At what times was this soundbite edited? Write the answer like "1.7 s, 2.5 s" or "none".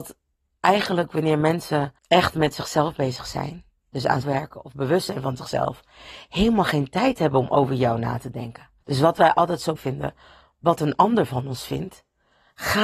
2.0 s, 4.2 s, 8.8 s, 9.8 s